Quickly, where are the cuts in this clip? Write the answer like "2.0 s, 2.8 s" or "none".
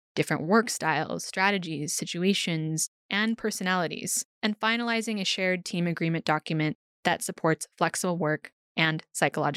4.3 s

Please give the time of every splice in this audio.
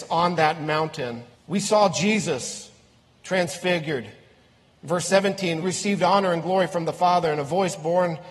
1.3 s, 3.0 s, 5.6 s

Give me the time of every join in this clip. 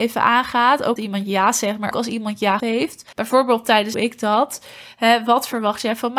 1.0 s, 1.9 s, 2.6 s, 3.1 s, 3.9 s

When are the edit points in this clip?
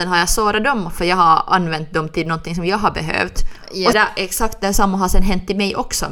3.9 s

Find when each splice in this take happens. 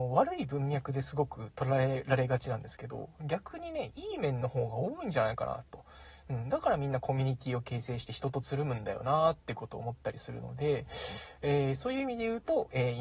none

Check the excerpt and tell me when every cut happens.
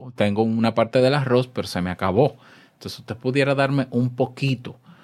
none

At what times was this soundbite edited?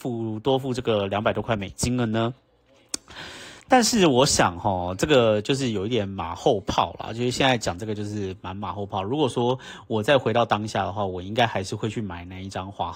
3.6 s

